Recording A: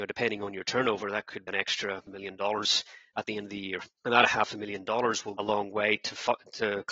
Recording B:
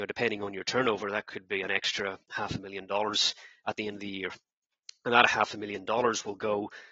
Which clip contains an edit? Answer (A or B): A